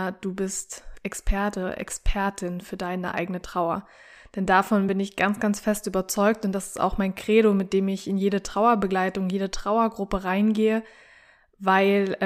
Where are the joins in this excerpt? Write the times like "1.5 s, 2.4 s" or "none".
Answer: none

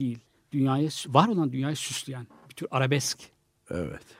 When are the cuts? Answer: none

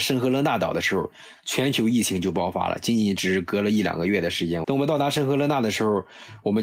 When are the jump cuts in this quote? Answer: 4.6 s

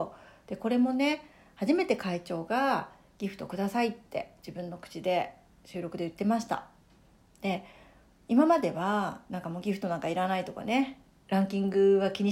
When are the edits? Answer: none

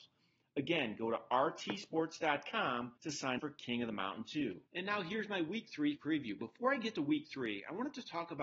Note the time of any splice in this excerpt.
3.0 s, 3.4 s, 4.7 s, 6.0 s

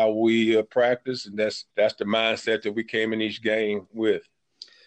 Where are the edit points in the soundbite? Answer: 1.7 s

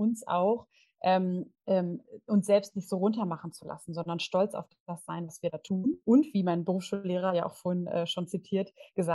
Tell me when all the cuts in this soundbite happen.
6.0 s

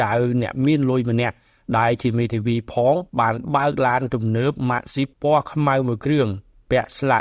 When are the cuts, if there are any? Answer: 3.1 s, 5.1 s

